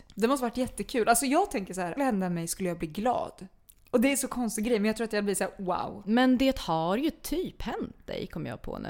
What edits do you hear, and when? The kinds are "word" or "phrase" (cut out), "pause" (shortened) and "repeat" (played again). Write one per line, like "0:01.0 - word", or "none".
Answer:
0:02.0 - phrase